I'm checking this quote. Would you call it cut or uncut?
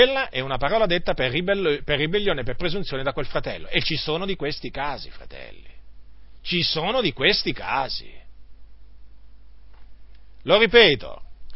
uncut